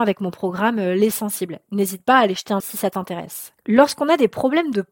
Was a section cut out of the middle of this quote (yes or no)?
yes